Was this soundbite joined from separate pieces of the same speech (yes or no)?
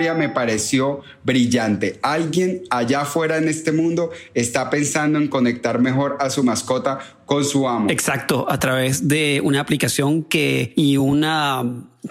no